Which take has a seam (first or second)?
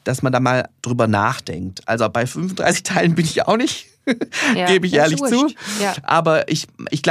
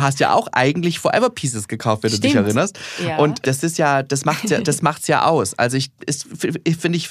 second